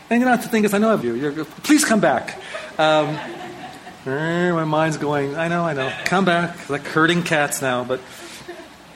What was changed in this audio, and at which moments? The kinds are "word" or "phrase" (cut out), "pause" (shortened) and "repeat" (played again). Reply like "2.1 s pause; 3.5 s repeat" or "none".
1.0 s phrase